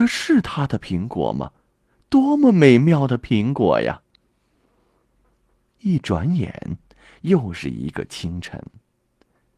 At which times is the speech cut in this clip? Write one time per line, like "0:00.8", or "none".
none